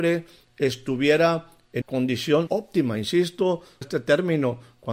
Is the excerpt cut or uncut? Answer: cut